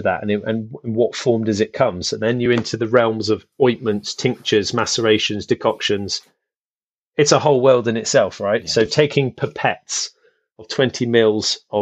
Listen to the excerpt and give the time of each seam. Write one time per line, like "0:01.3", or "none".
none